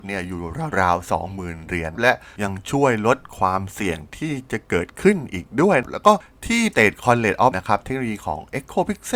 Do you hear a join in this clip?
yes; 2 cuts; at 6.7 s, 7.5 s

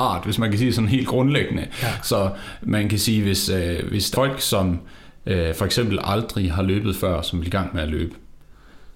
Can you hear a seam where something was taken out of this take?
yes; 1 cut; at 4.1 s

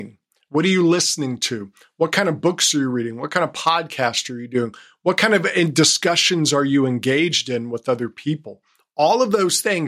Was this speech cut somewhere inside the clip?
no; 0 cuts

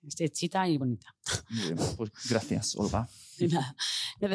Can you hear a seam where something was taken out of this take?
no; 0 cuts

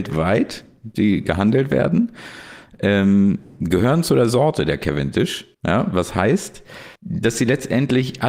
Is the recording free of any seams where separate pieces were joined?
no; 2 cuts; at 5.5 s, 7.0 s

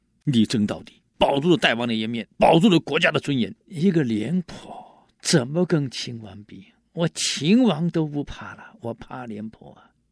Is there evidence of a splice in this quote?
yes; 3 cuts; at 1.1 s, 2.3 s, 3.6 s

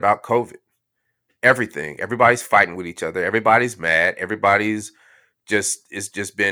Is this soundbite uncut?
yes; 0 cuts

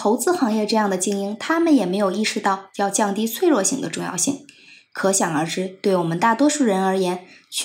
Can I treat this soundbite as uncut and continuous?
yes; 0 cuts

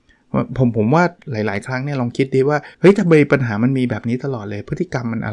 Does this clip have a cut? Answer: yes; 1 cut; at 2.7 s

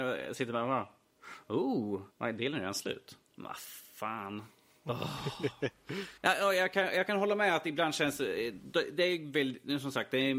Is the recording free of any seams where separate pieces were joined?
no; 3 cuts; at 2.1 s, 3.3 s, 6.2 s

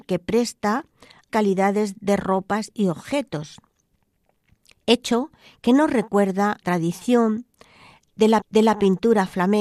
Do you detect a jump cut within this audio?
yes; 3 cuts; at 1.3 s, 6.6 s, 8.4 s

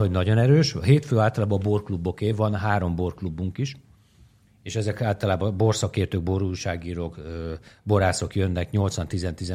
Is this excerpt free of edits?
yes; 0 cuts

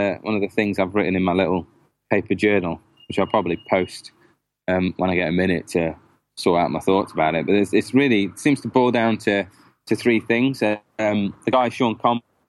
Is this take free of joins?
yes; 0 cuts

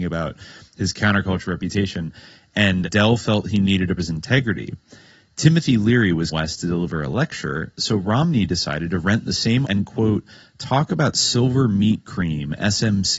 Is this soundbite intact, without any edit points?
no; 4 cuts; at 2.8 s, 4.0 s, 6.3 s, 9.6 s

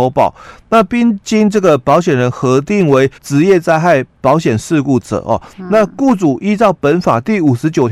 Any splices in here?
yes; 1 cut; at 3.2 s

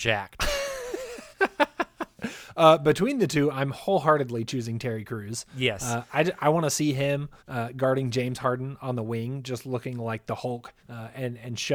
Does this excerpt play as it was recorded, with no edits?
no; 3 cuts; at 1.3 s, 7.4 s, 10.8 s

